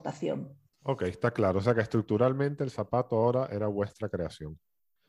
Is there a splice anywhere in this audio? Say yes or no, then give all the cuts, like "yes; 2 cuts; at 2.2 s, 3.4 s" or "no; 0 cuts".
no; 0 cuts